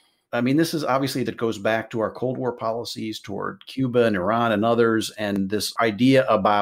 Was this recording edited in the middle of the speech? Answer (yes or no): yes